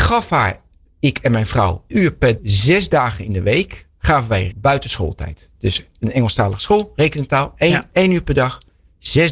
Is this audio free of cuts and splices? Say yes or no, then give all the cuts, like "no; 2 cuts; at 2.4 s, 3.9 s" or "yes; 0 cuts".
no; 3 cuts; at 1.9 s, 2.4 s, 4.5 s